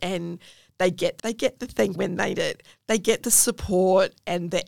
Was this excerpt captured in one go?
no; 3 cuts; at 1.2 s, 2.0 s, 2.3 s

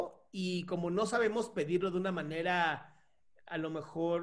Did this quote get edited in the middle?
no; 0 cuts

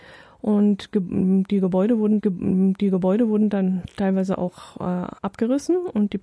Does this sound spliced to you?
yes; 2 cuts; at 2.2 s, 5.2 s

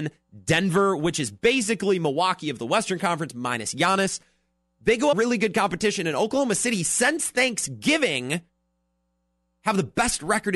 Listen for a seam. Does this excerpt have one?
yes; 1 cut; at 5.1 s

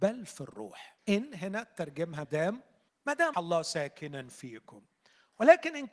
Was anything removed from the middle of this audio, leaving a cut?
yes; 4 cuts; at 1.0 s, 2.2 s, 2.9 s, 3.3 s

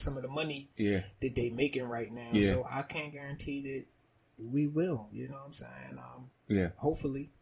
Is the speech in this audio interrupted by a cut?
no; 0 cuts

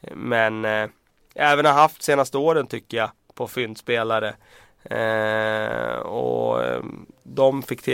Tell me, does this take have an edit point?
no; 0 cuts

